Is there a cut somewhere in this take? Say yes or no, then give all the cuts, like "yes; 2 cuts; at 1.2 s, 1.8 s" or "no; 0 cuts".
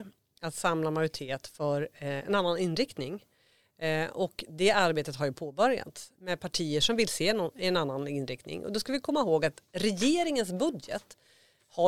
no; 0 cuts